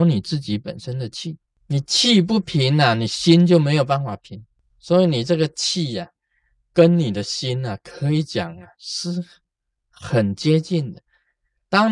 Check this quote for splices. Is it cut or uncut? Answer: uncut